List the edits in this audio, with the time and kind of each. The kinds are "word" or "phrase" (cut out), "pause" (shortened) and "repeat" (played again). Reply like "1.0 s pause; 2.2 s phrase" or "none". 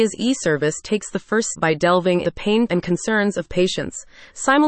1.5 s word; 2.2 s word; 2.7 s word; 3.5 s word